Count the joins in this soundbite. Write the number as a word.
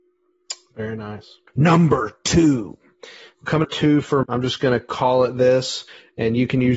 three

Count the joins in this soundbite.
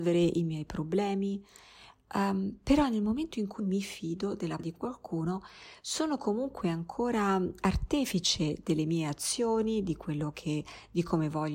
two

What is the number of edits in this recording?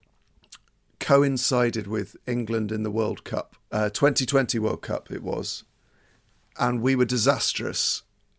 one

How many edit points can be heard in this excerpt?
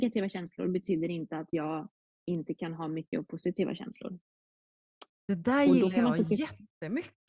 zero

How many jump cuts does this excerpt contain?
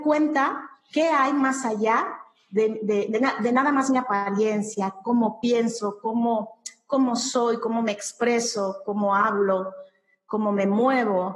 zero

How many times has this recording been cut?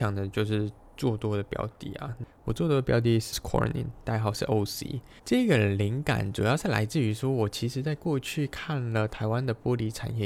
two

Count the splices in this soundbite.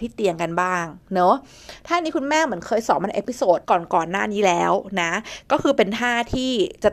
one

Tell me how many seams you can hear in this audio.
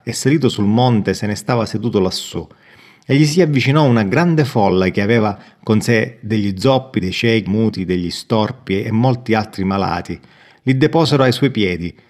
one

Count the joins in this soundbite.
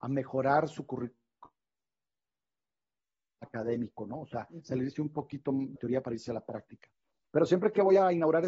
one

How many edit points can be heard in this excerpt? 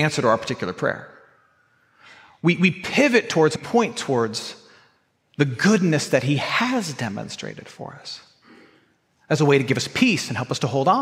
one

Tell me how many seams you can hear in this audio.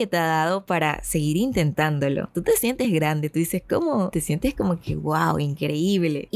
zero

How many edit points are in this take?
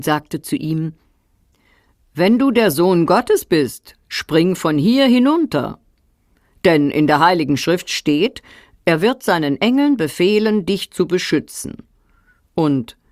zero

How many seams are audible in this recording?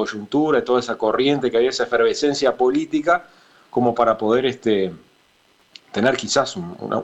zero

